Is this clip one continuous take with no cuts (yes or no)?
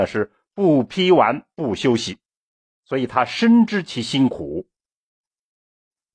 yes